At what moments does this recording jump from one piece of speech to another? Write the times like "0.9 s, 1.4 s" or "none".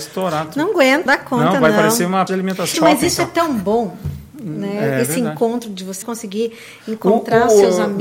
1.1 s, 2.3 s, 2.7 s, 4.3 s, 6.0 s

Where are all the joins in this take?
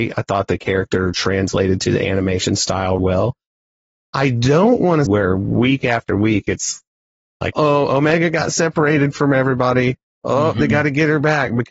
3.0 s, 5.1 s, 7.5 s

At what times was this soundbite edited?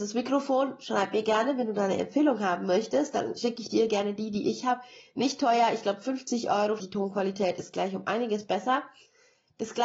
6.8 s

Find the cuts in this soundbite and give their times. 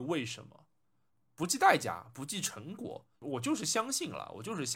3.1 s

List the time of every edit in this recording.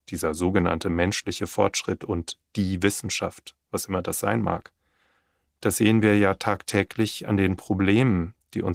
none

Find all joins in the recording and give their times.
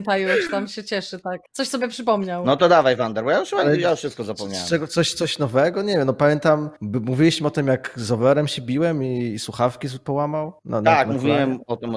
1.5 s, 6.8 s, 10.6 s

